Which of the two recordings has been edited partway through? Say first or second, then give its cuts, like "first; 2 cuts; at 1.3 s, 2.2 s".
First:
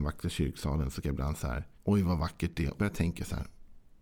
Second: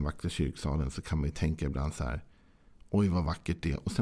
first; 3 cuts; at 1.0 s, 1.7 s, 2.8 s